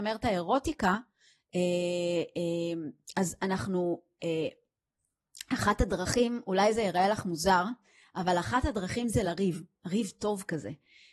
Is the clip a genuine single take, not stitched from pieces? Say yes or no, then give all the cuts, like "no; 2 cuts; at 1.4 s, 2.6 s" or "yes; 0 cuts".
yes; 0 cuts